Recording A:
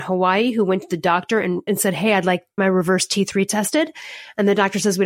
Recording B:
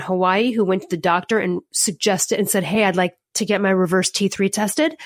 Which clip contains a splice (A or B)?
A